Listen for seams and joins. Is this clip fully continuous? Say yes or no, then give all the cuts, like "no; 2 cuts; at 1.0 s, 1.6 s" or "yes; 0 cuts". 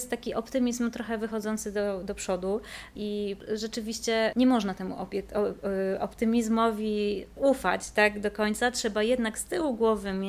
yes; 0 cuts